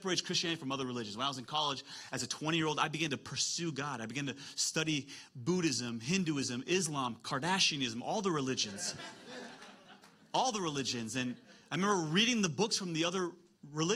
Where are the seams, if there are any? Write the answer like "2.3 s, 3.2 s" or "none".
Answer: none